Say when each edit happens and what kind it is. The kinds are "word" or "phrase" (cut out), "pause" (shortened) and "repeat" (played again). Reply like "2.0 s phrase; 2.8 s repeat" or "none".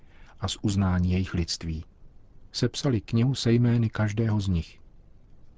none